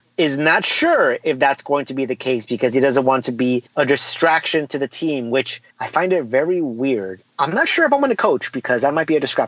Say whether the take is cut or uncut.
cut